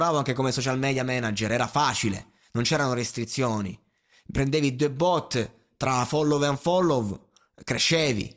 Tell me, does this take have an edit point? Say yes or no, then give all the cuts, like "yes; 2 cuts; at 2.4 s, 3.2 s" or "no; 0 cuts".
no; 0 cuts